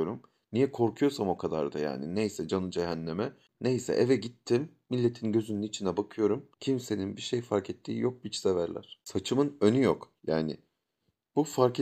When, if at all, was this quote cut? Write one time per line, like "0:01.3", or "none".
0:06.5